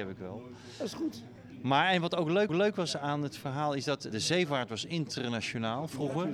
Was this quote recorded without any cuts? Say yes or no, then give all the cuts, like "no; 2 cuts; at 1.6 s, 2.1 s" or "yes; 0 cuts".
no; 2 cuts; at 2.5 s, 4.1 s